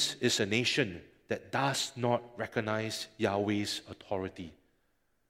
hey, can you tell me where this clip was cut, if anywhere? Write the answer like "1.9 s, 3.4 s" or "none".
none